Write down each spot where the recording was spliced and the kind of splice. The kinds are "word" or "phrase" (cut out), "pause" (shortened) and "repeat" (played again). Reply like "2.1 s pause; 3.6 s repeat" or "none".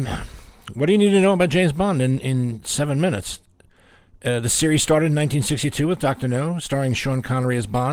none